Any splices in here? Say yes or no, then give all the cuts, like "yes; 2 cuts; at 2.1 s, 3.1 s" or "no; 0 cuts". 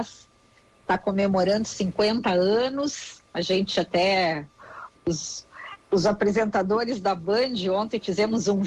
yes; 1 cut; at 5.8 s